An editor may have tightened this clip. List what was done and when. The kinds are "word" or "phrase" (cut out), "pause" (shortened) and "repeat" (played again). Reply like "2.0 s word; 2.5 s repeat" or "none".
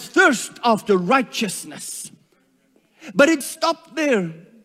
3.4 s word